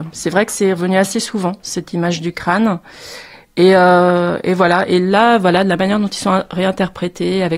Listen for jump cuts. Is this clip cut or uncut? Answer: uncut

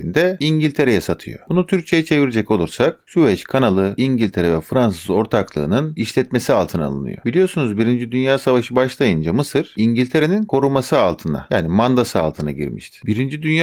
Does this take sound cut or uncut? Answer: uncut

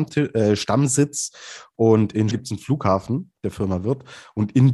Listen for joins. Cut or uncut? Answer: cut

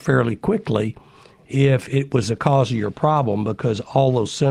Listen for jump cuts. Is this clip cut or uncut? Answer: uncut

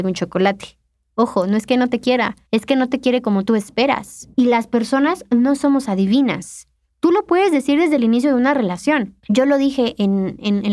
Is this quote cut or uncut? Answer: cut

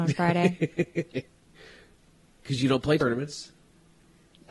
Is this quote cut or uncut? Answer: uncut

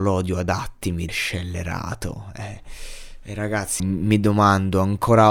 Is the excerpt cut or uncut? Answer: cut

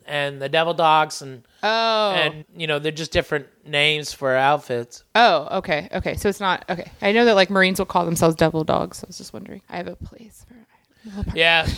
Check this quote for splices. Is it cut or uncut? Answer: cut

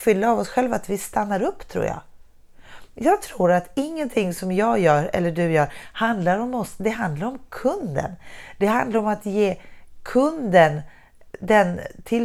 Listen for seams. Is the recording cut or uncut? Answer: uncut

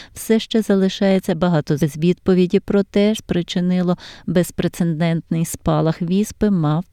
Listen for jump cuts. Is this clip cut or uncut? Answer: cut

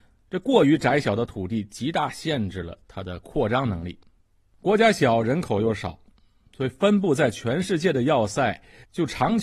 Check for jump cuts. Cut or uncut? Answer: uncut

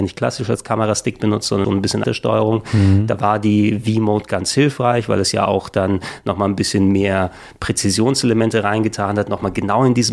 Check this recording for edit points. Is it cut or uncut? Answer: cut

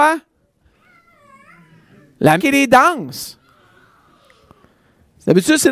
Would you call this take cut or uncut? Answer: cut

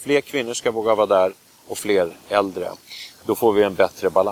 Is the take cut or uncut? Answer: uncut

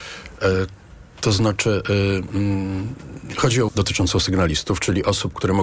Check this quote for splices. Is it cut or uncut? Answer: cut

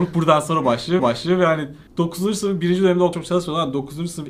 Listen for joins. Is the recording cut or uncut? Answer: cut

